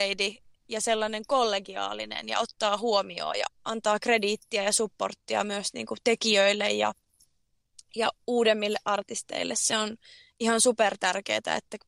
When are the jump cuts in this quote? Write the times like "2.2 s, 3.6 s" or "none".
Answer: 3.5 s